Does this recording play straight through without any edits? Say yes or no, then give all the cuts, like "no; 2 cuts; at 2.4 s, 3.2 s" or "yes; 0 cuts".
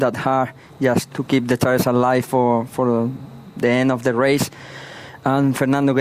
no; 1 cut; at 1.1 s